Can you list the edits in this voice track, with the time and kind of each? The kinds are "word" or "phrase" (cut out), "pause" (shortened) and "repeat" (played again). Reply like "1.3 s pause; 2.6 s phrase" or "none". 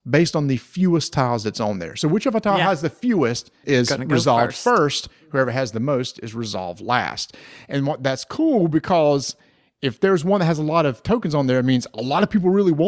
3.6 s word

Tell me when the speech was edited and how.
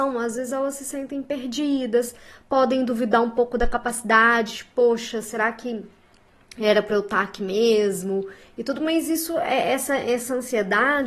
none

